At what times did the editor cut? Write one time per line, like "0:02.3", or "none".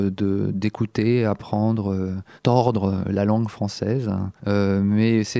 0:02.4
0:04.4

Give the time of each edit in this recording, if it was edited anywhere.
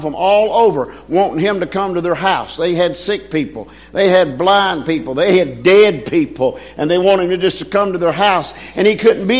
none

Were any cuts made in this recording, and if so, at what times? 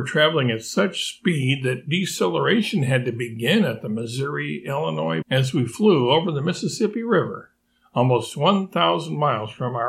0:05.2

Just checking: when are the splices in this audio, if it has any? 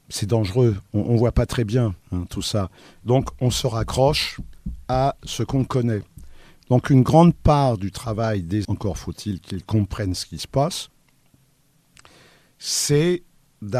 0:02.0
0:08.6

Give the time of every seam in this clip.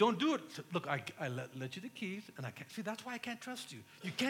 none

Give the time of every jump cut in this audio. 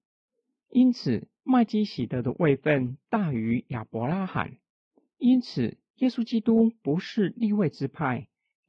none

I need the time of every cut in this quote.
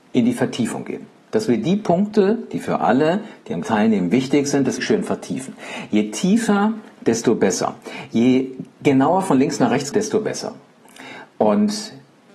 0:03.6
0:04.8
0:09.9

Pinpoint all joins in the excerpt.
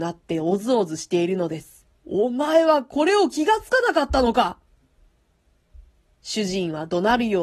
0:02.0

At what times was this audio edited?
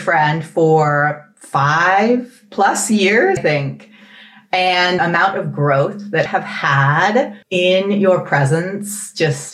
0:03.4
0:05.0
0:06.3
0:07.4

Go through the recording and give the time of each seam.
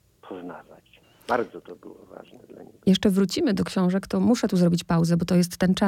0:01.0

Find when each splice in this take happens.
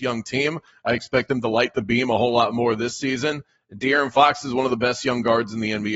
none

